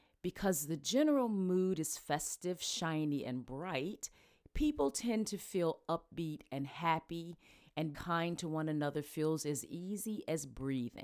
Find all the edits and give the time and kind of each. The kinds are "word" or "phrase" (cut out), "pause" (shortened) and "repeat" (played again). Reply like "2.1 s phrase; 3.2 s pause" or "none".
7.9 s word